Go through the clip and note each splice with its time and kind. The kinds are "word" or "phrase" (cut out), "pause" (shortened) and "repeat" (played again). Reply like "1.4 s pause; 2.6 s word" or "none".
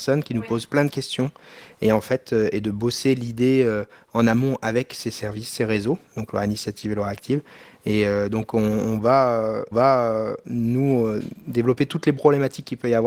9.7 s repeat